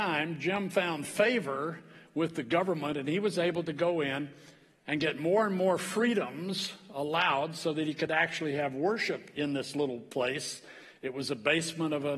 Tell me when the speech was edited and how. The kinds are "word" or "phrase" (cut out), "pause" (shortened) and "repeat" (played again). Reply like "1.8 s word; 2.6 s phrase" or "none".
none